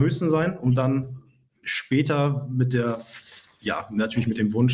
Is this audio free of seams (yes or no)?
yes